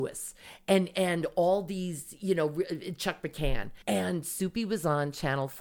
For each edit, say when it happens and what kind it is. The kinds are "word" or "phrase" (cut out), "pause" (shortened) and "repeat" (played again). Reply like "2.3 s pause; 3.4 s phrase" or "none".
3.8 s pause